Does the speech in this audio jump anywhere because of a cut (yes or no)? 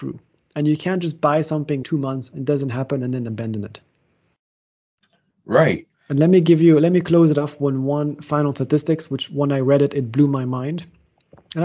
yes